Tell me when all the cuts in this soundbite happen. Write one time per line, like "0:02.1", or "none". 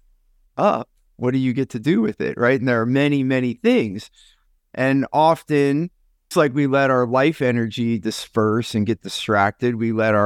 0:06.3